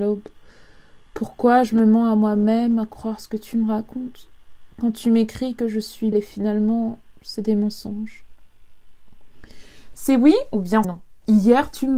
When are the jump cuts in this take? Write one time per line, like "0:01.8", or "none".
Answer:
0:06.1
0:10.8